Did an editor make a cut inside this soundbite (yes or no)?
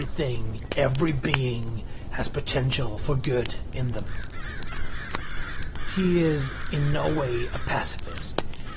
no